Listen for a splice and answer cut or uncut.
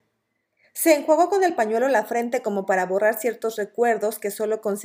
uncut